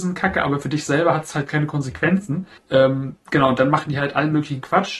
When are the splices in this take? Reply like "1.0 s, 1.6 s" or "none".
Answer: 2.6 s